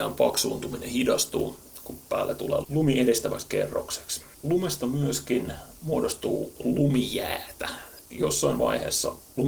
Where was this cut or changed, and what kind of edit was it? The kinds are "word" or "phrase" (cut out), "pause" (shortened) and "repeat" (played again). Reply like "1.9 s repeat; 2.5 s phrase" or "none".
4.3 s pause; 8.1 s word